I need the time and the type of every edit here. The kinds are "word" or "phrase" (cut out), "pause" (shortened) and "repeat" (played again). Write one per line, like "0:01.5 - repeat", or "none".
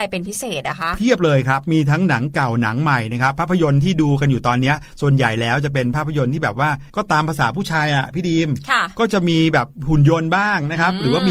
0:06.9 - pause